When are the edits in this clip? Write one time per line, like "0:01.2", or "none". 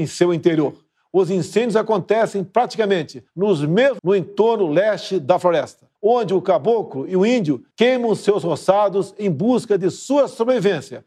0:03.3
0:04.0
0:06.0
0:07.7

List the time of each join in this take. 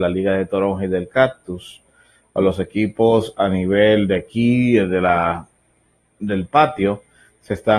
none

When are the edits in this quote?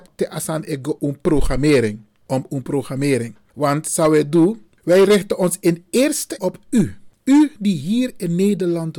0:01.0
0:06.4

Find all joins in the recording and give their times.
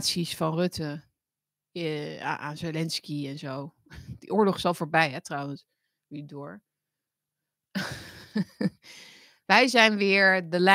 none

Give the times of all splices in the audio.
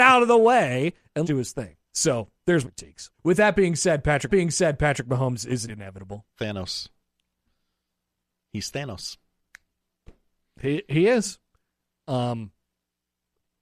0:01.2
0:01.8
0:02.6
0:03.1
0:04.3
0:05.7
0:06.3

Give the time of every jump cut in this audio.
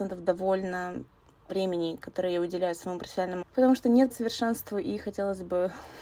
0:01.5
0:03.4
0:04.1

